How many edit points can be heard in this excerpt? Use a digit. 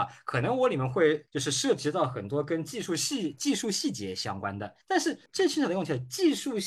3